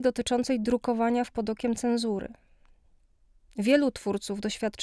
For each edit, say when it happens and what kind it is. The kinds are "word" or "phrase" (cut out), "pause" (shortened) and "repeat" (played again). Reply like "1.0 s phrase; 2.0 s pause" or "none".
1.3 s word